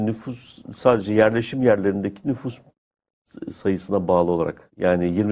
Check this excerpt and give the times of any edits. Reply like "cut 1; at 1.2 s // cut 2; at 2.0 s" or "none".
none